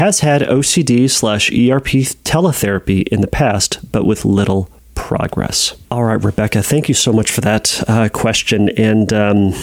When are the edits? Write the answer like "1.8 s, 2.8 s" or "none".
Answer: 5.8 s